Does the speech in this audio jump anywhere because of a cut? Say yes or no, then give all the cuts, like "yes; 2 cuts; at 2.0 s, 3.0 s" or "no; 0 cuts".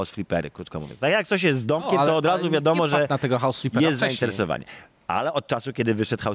no; 0 cuts